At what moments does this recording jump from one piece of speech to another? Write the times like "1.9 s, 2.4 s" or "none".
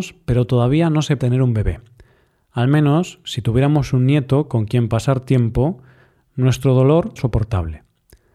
1.2 s, 7.2 s